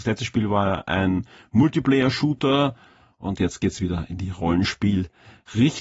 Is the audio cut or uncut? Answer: uncut